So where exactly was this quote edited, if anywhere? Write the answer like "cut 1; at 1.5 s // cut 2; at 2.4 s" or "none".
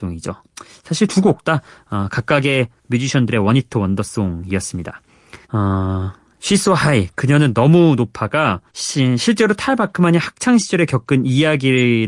cut 1; at 5.4 s // cut 2; at 8.7 s

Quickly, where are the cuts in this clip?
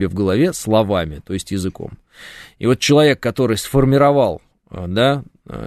none

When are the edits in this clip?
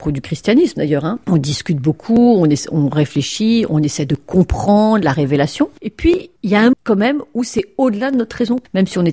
cut 1; at 6.7 s

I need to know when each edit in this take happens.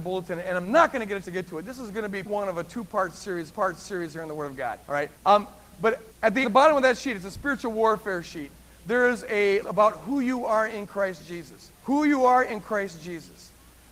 cut 1; at 1.2 s // cut 2; at 2.2 s // cut 3; at 3.5 s // cut 4; at 4.8 s // cut 5; at 5.2 s // cut 6; at 6.1 s // cut 7; at 6.4 s // cut 8; at 9.6 s // cut 9; at 11.7 s

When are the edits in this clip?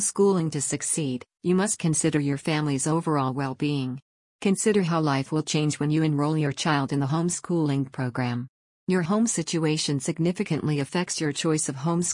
none

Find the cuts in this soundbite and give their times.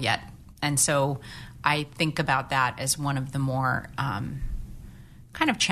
none

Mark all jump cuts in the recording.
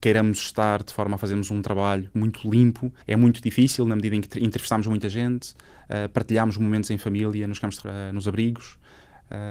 cut 1; at 3.0 s // cut 2; at 7.8 s

